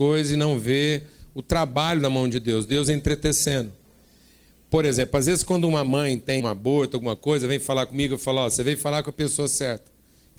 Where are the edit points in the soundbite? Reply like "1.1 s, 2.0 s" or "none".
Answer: 6.4 s